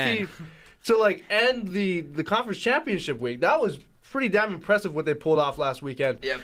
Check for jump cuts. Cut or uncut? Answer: uncut